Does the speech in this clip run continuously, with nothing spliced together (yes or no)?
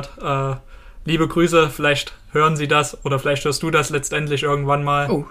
yes